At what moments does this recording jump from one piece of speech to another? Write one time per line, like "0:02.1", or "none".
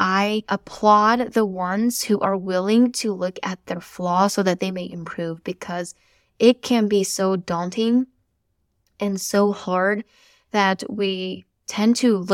none